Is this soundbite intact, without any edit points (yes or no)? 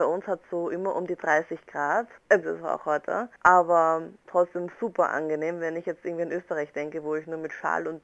no